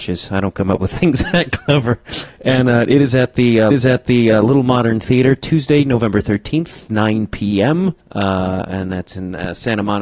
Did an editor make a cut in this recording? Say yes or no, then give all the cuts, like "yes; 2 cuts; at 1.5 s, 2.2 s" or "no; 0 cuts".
yes; 2 cuts; at 3.7 s, 8.0 s